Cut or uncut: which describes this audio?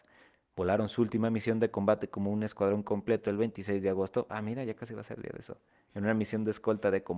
uncut